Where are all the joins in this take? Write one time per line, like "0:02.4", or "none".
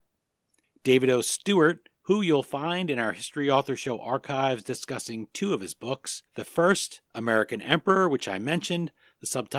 0:01.9
0:06.3
0:07.1